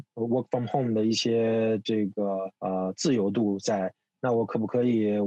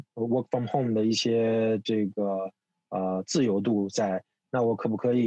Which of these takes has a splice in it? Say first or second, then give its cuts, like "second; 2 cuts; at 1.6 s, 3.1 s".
first; 1 cut; at 2.6 s